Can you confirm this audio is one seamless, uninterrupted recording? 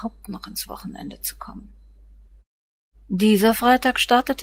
yes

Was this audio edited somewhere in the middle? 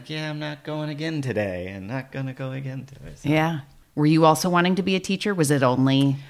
no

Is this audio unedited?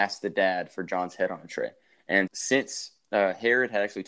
no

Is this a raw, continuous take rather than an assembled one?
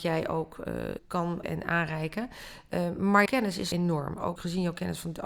no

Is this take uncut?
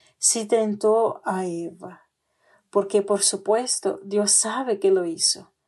yes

